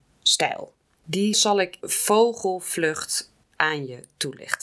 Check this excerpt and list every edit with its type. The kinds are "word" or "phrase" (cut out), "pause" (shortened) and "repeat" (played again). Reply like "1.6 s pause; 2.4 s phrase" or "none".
1.3 s word; 1.8 s word